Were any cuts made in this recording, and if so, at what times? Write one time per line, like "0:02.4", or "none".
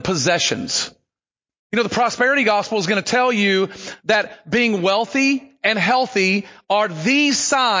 none